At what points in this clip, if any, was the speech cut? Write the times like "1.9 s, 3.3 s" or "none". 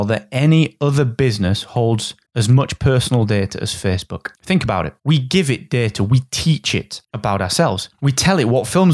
2.3 s, 4.3 s, 5.0 s, 7.0 s, 7.9 s